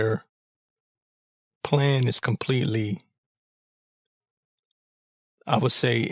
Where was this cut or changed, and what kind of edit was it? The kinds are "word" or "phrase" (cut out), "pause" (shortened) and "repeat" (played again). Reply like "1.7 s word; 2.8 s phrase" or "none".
none